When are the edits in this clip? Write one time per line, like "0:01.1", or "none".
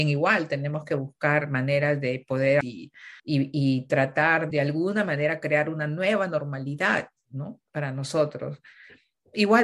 0:02.6
0:03.2
0:04.5
0:07.7

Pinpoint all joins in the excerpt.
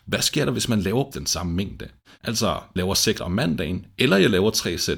0:01.1
0:02.8
0:03.2

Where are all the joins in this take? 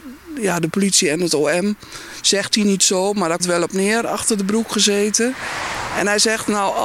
0:03.4

